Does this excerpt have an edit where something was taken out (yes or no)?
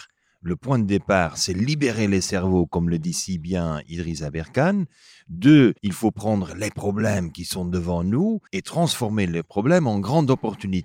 yes